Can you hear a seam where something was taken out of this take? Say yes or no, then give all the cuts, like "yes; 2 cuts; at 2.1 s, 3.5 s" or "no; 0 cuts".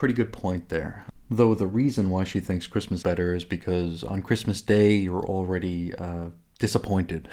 yes; 1 cut; at 3.0 s